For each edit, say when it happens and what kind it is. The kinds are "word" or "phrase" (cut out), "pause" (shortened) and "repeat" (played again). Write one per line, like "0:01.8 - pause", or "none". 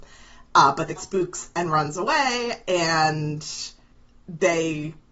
0:01.0 - word